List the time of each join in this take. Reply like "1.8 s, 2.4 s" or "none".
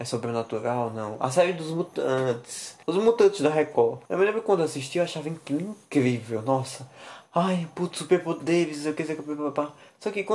2.8 s, 4.1 s